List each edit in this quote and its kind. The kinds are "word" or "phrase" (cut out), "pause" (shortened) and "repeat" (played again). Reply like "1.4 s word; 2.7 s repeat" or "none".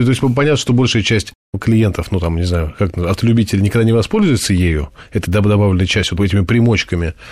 6.2 s word